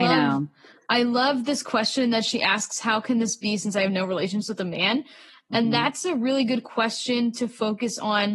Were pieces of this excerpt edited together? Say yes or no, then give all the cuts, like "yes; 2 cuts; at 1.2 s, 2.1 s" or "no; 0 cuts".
no; 0 cuts